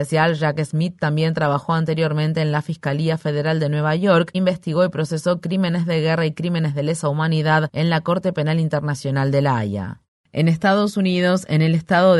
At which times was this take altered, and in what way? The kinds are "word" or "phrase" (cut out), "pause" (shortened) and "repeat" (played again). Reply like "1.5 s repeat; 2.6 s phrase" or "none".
4.3 s word